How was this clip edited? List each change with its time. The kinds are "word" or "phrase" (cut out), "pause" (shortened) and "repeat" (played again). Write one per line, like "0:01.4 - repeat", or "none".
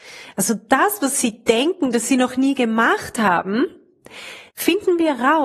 0:04.5 - pause